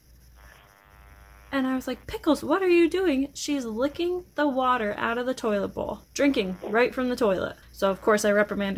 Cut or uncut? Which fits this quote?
cut